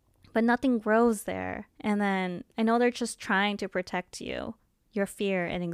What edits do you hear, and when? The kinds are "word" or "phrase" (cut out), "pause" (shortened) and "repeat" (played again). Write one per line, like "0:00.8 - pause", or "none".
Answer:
0:01.7 - pause
0:02.5 - pause